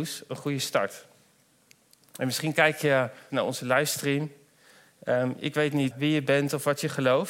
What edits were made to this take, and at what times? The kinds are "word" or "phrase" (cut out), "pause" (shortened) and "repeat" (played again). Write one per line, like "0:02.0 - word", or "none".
0:03.3 - phrase
0:05.9 - word